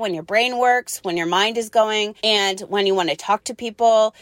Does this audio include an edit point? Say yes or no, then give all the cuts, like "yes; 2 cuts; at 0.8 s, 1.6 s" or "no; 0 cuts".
yes; 1 cut; at 2.2 s